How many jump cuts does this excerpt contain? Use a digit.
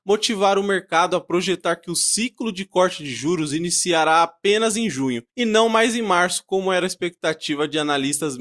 1